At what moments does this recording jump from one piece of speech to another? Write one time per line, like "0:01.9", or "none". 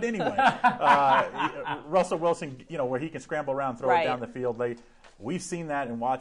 none